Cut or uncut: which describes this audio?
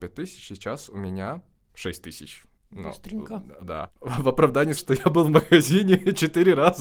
cut